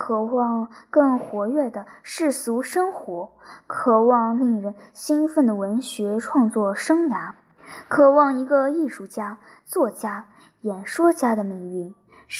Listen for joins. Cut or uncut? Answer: uncut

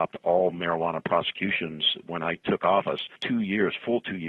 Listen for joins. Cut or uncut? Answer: cut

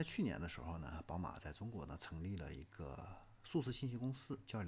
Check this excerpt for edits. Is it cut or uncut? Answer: uncut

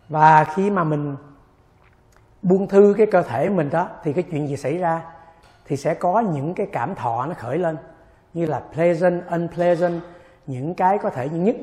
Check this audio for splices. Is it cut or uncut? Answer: uncut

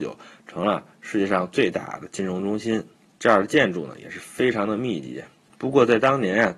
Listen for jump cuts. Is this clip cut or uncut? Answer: uncut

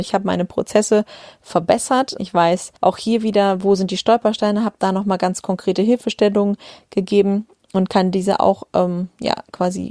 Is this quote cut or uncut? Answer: cut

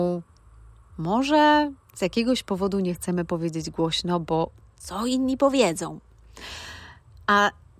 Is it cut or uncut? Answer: uncut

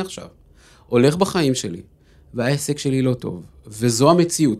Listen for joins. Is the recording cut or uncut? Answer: uncut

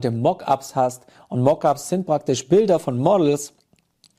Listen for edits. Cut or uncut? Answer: uncut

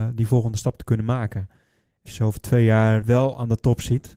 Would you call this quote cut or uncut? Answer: cut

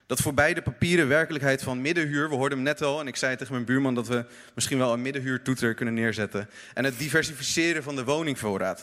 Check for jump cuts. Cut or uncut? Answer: uncut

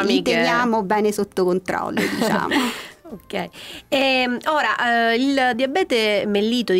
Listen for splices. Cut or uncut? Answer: uncut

